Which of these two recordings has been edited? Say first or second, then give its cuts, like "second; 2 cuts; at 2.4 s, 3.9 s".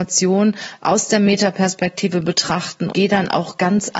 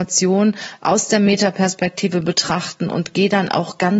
first; 1 cut; at 2.9 s